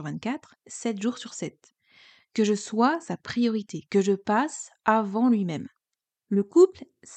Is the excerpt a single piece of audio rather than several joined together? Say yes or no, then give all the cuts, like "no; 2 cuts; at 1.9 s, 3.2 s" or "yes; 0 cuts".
yes; 0 cuts